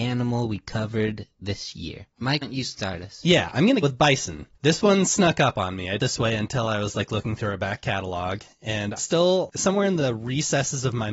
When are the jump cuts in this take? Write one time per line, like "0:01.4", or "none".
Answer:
0:02.4
0:03.8
0:04.5
0:06.0
0:09.0